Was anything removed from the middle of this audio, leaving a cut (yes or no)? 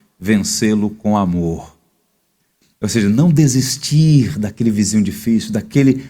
no